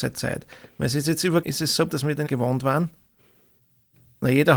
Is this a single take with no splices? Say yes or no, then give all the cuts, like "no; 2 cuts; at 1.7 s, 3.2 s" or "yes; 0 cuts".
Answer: no; 3 cuts; at 1.4 s, 1.9 s, 2.3 s